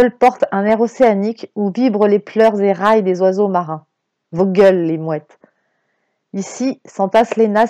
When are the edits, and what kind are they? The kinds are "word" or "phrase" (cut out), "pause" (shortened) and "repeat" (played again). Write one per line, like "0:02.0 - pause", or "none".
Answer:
none